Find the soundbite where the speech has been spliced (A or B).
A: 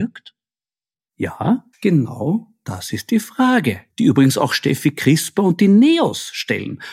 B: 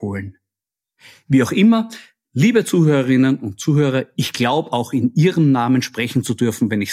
A